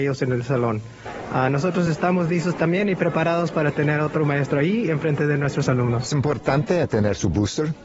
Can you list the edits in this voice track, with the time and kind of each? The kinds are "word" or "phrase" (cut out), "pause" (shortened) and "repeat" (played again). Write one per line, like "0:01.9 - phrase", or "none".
none